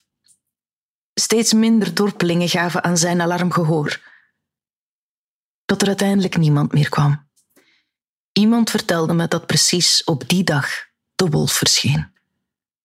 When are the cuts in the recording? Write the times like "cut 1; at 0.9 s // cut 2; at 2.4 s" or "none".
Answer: none